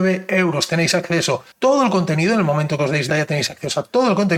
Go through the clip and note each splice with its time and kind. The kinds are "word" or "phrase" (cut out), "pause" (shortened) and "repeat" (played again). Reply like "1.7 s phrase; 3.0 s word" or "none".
1.5 s pause; 3.1 s word